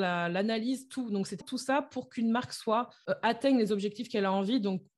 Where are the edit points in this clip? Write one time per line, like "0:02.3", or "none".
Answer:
0:01.4